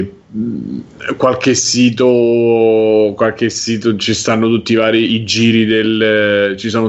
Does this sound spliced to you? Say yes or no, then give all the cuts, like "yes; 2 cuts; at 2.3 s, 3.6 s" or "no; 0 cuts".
no; 0 cuts